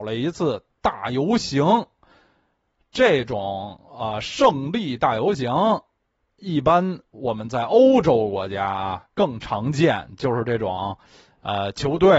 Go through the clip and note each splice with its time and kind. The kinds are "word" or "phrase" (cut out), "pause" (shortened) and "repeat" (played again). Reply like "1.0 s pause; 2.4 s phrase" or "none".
none